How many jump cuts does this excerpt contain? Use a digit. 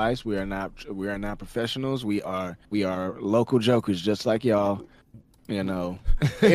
1